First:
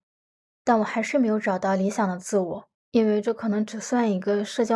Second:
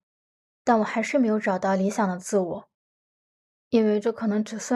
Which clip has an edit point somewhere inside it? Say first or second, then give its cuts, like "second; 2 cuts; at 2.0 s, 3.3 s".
first; 1 cut; at 2.8 s